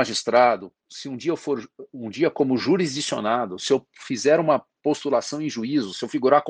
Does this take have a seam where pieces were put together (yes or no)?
no